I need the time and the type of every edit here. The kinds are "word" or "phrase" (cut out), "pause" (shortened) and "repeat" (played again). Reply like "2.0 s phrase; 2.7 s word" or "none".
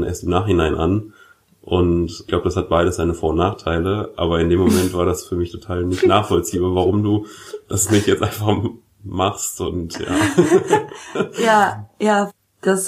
none